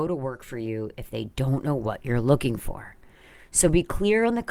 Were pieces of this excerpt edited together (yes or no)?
no